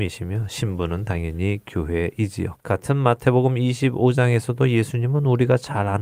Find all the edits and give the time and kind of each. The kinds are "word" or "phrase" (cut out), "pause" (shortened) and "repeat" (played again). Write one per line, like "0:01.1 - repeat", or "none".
0:02.6 - pause